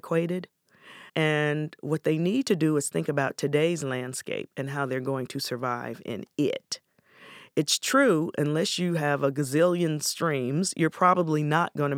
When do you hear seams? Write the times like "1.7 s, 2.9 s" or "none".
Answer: 1.1 s